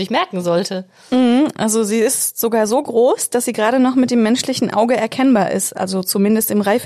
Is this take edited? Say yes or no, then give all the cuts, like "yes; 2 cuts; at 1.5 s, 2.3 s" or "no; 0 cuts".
no; 0 cuts